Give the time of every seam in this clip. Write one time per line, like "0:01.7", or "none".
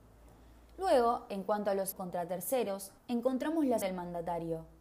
0:01.9
0:03.0
0:03.8